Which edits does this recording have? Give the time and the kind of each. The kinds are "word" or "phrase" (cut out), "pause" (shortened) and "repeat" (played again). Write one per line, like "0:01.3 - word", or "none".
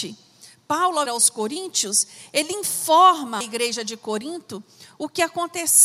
0:01.1 - word
0:03.4 - word